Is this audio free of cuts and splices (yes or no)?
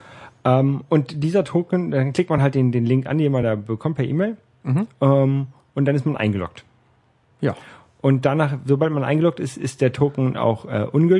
yes